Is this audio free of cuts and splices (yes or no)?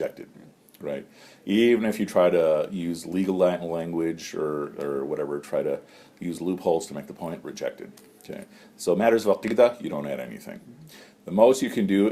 yes